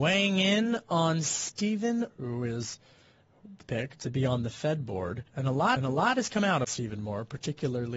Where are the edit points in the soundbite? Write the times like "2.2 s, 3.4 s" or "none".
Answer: 2.1 s, 3.6 s, 5.3 s, 5.8 s, 6.6 s